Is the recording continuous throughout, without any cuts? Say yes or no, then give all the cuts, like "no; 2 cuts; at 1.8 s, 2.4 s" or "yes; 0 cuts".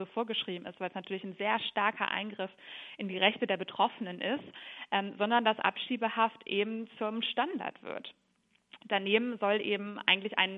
yes; 0 cuts